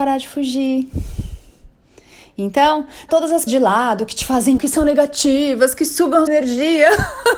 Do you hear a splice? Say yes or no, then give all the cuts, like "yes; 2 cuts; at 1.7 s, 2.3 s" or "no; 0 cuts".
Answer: yes; 4 cuts; at 3.1 s, 3.5 s, 4.6 s, 6.3 s